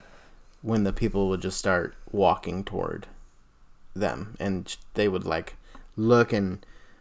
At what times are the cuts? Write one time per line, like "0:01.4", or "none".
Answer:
none